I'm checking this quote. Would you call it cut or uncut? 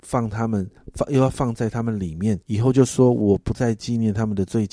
cut